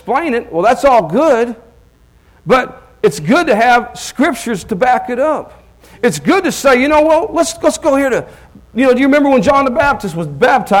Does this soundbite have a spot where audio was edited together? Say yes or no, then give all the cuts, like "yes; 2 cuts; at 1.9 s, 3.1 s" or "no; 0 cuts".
no; 0 cuts